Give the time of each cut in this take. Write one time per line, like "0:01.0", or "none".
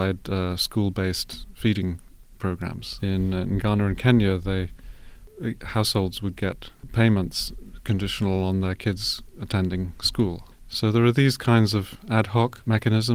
none